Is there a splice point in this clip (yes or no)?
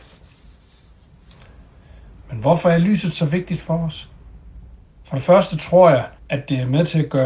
yes